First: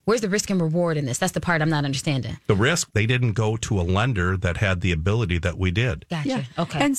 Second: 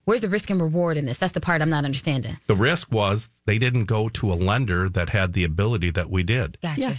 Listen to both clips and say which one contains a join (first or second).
first